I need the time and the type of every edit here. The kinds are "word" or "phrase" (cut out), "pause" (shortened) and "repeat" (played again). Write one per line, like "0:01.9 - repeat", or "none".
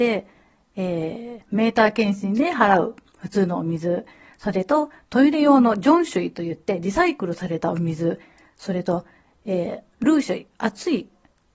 none